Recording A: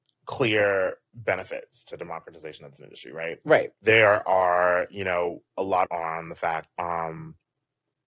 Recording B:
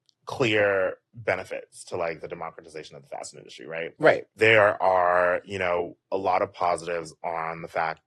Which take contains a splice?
A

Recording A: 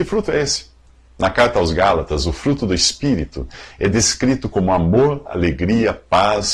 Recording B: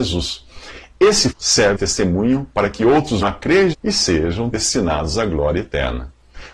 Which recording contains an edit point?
B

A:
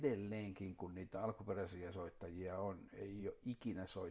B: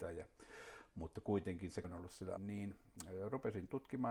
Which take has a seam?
B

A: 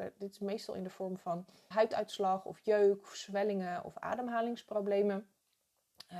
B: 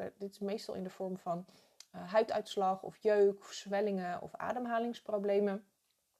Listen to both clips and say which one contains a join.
A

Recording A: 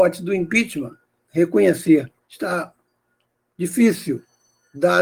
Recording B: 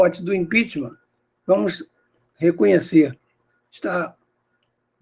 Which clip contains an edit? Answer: A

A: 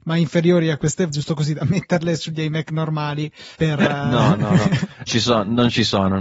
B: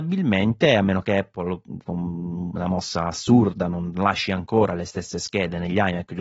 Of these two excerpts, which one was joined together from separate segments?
A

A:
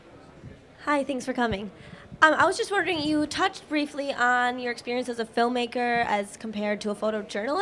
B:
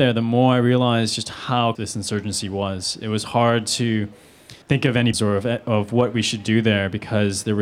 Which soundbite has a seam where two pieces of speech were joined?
B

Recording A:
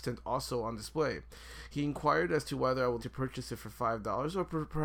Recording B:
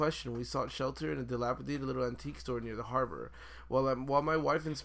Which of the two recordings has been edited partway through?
A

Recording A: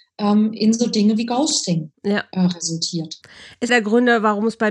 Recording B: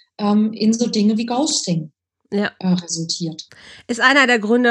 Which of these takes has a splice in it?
A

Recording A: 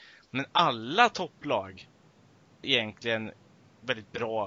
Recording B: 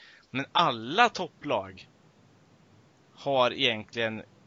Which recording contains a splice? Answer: A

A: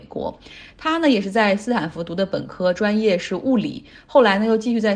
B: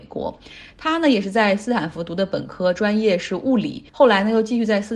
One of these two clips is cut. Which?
B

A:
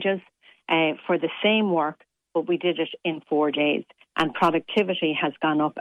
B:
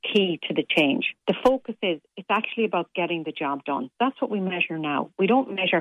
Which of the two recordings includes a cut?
B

